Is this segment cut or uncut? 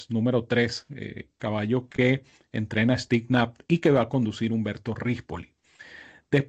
uncut